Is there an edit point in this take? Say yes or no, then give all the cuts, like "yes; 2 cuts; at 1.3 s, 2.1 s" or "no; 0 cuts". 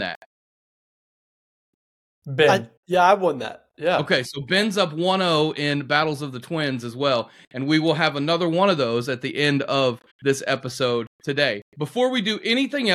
yes; 3 cuts; at 2.8 s, 10.1 s, 11.1 s